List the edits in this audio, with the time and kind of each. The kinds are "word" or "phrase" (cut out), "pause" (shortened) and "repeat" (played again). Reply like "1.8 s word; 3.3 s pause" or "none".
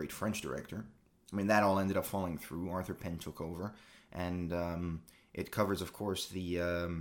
none